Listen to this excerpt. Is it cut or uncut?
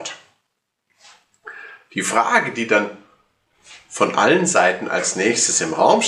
uncut